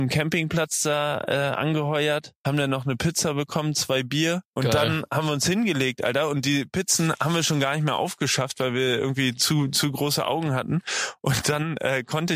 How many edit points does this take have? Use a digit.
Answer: 2